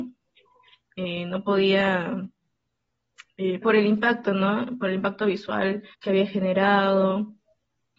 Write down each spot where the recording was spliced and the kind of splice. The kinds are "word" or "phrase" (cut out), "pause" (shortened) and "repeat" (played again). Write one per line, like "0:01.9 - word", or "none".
0:03.6 - word
0:05.9 - pause